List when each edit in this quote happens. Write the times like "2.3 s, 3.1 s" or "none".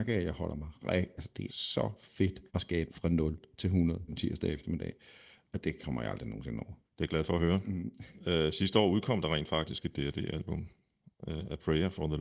1.5 s, 2.5 s, 2.9 s, 4.1 s, 6.8 s